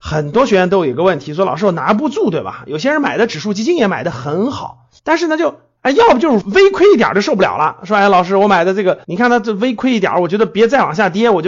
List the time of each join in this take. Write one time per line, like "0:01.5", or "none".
0:05.0
0:09.0